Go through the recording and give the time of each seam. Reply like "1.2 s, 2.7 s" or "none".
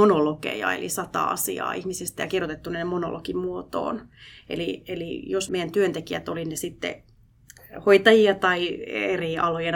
5.5 s